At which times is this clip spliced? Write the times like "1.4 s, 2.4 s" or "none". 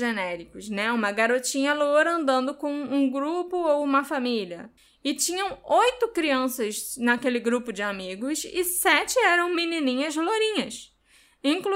4.8 s

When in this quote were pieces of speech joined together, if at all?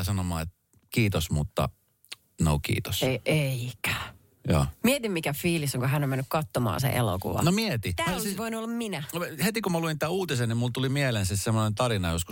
none

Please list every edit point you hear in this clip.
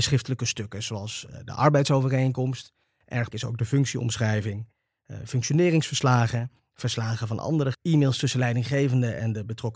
3.3 s, 7.7 s

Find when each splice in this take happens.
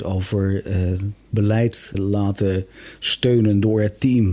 1.9 s

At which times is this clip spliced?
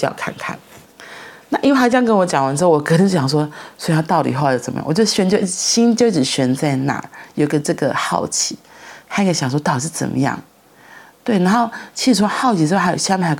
none

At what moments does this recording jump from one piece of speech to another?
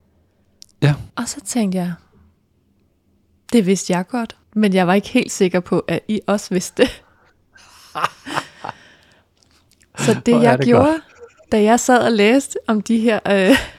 1.1 s, 4.4 s

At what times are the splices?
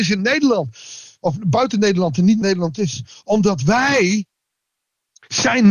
2.4 s

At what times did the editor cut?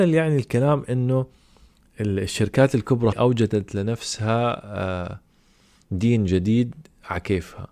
3.1 s

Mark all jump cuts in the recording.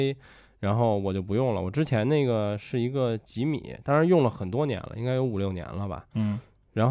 none

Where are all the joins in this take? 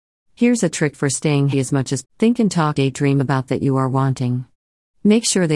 1.5 s, 2.0 s, 2.8 s, 3.5 s

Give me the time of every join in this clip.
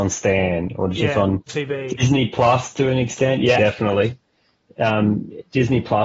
0.9 s, 1.5 s, 3.6 s

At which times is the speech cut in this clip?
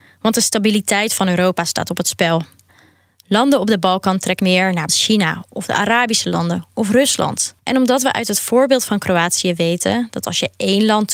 4.4 s, 4.9 s, 7.6 s

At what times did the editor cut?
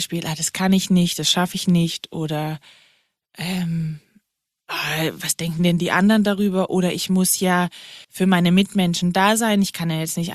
8.0 s

